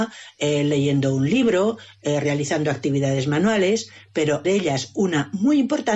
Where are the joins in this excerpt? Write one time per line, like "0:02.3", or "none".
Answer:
0:04.4